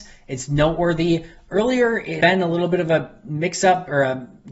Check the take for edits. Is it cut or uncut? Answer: cut